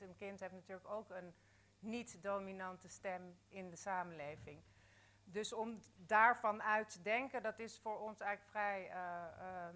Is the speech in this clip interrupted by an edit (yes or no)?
no